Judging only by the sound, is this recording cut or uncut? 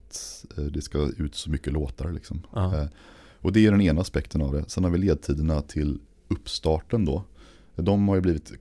uncut